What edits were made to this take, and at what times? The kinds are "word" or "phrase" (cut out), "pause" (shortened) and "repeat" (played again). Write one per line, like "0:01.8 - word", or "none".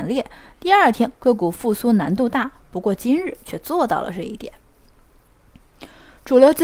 none